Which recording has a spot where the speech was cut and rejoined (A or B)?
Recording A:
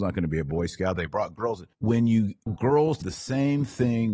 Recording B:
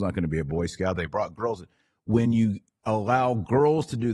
A